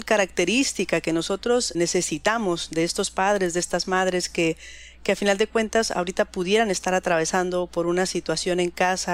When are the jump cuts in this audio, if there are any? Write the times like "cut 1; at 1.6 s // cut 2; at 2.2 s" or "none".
cut 1; at 1.7 s